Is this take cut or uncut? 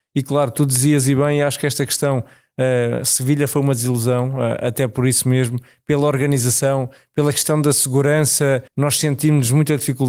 cut